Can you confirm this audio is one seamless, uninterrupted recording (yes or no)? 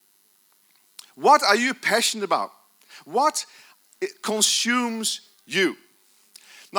yes